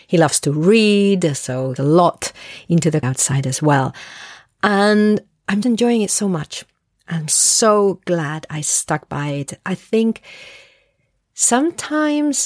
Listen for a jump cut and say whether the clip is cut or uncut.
cut